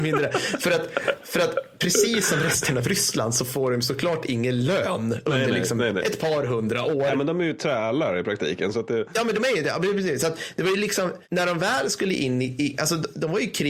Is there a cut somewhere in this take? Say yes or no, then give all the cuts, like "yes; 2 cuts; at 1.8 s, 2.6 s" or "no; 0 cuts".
no; 0 cuts